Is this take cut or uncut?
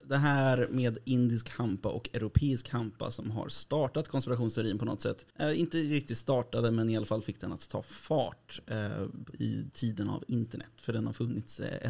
cut